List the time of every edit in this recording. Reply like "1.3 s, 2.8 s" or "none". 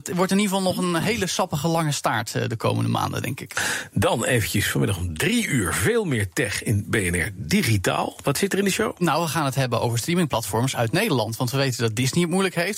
none